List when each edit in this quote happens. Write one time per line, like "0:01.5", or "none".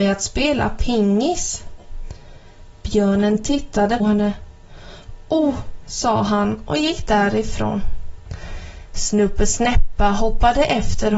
0:04.0
0:05.9